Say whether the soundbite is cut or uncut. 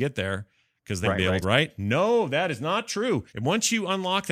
cut